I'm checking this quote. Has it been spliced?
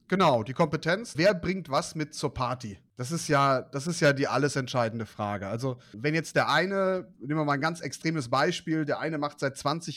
yes; 2 cuts; at 1.1 s, 5.9 s

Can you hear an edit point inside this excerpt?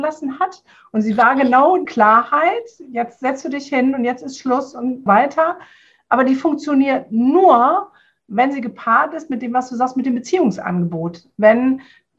yes; 2 cuts; at 1.9 s, 5.1 s

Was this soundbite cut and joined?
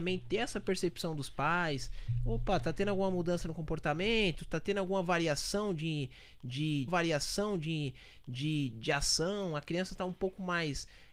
yes; 1 cut; at 6.9 s

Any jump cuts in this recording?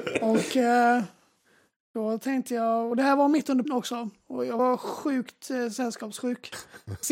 yes; 1 cut; at 3.7 s

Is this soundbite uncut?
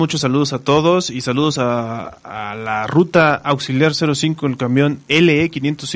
yes; 0 cuts

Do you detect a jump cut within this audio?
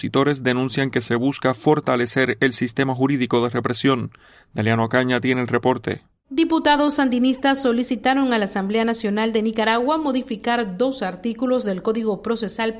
no; 0 cuts

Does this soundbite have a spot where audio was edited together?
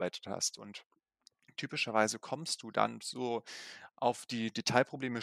no; 0 cuts

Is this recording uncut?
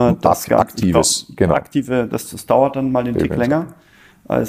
yes; 0 cuts

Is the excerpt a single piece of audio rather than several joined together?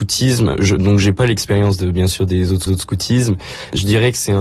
no; 1 cut; at 2.7 s

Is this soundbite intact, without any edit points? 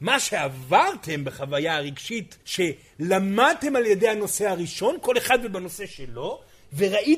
no; 1 cut; at 2.4 s

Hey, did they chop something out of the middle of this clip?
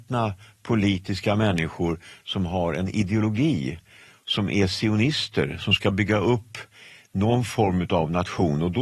no; 0 cuts

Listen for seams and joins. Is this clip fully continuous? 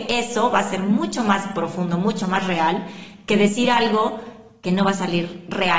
yes; 0 cuts

